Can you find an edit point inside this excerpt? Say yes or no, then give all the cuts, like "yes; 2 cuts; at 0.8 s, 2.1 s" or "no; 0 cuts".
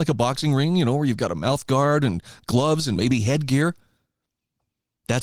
no; 0 cuts